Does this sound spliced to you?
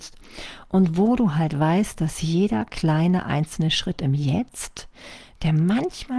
no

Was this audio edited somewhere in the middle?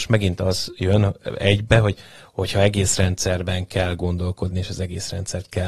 no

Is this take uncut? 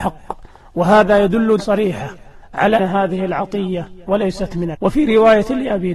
no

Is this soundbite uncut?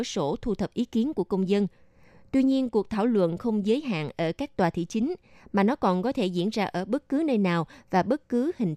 yes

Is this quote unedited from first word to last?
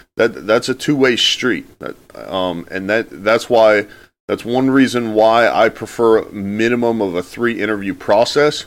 yes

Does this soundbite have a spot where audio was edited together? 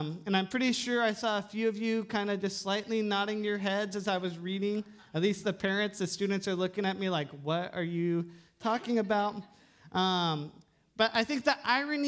no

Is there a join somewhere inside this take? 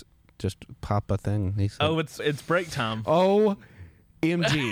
yes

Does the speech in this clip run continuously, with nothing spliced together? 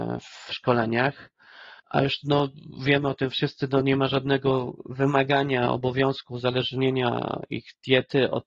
no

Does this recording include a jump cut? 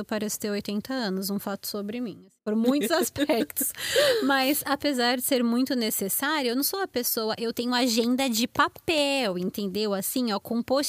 yes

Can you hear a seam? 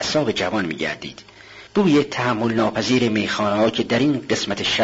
yes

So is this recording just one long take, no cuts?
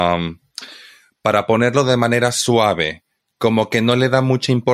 yes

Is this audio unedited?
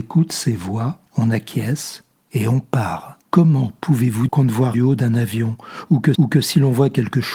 no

